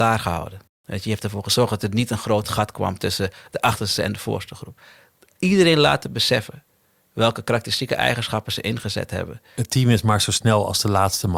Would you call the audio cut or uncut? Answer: uncut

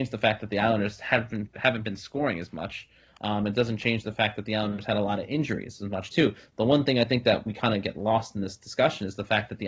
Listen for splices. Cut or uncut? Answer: uncut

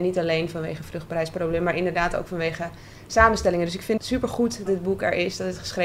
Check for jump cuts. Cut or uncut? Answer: cut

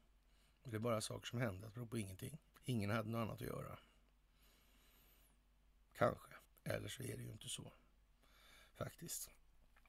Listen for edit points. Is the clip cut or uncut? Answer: cut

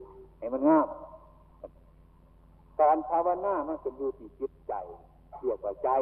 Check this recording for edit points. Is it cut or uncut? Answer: uncut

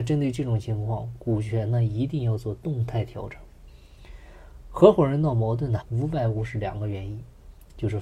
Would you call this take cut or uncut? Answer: cut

